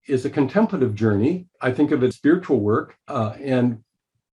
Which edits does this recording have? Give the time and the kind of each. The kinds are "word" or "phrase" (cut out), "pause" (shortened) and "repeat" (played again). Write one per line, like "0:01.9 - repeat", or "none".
0:01.5 - pause
0:02.1 - word
0:03.0 - pause

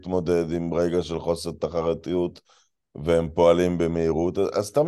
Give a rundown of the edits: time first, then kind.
none

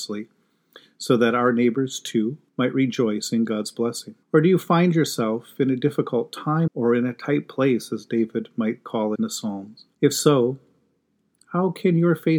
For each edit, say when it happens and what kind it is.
0:02.5 - pause
0:04.2 - pause
0:06.7 - word
0:09.1 - word
0:09.9 - pause

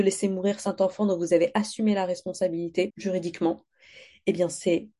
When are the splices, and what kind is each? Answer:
0:02.9 - word

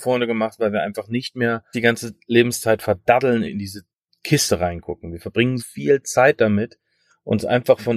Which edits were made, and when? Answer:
0:01.7 - word
0:03.4 - word
0:05.6 - word

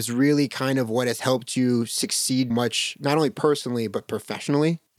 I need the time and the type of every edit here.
0:02.5 - word

